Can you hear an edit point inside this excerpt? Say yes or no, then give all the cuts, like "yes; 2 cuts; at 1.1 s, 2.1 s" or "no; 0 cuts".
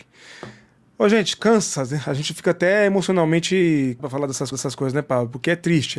yes; 2 cuts; at 4.0 s, 4.5 s